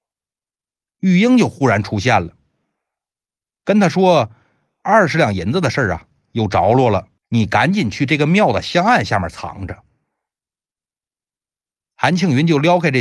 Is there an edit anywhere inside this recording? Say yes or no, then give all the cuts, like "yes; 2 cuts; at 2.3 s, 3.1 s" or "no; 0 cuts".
yes; 1 cut; at 7.2 s